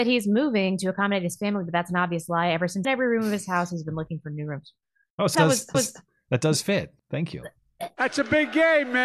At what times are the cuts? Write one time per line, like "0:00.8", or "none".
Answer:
0:02.8
0:05.3
0:05.7
0:07.0